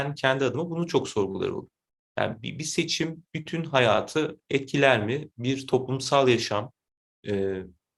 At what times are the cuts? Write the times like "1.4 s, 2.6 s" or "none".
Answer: none